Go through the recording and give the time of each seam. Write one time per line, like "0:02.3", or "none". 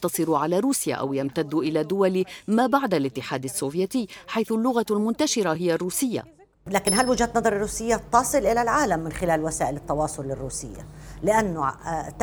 none